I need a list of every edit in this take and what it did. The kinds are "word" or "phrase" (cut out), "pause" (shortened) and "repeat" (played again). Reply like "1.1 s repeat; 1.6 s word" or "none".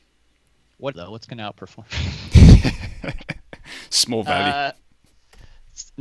0.9 s phrase